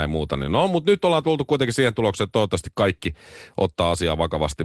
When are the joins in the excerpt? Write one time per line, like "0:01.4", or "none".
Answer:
none